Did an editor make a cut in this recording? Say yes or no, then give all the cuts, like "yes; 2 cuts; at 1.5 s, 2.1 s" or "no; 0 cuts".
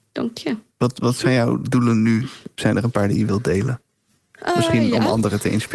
no; 0 cuts